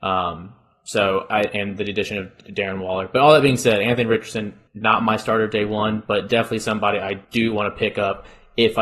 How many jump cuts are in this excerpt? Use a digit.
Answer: 2